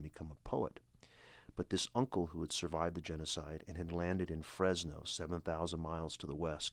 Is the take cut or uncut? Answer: uncut